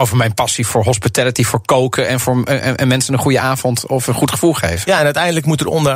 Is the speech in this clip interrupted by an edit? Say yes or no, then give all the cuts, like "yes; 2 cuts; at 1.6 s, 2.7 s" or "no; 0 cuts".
no; 0 cuts